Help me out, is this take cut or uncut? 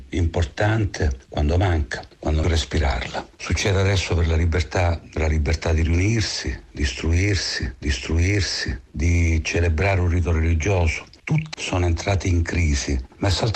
cut